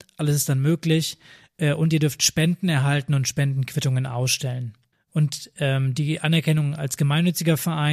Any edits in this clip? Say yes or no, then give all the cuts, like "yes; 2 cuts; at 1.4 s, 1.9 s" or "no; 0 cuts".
no; 0 cuts